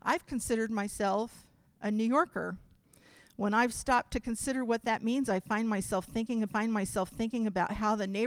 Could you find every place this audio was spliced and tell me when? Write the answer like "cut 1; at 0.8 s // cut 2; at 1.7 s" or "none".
cut 1; at 6.5 s